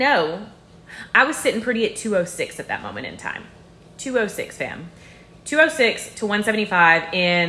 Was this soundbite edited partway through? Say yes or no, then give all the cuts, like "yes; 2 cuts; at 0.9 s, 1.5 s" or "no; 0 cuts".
no; 0 cuts